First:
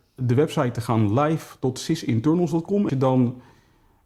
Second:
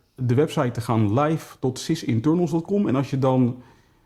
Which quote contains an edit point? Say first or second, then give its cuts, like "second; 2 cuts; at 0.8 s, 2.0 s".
first; 1 cut; at 2.9 s